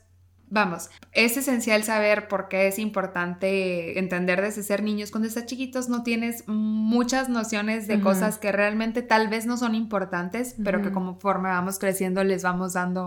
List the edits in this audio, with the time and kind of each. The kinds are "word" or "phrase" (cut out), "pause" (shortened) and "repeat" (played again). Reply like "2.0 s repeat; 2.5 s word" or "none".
1.0 s pause